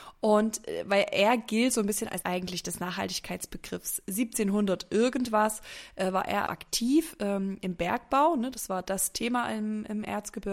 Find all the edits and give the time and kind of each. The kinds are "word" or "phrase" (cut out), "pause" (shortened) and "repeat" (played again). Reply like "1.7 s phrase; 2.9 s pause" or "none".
2.2 s phrase; 6.5 s word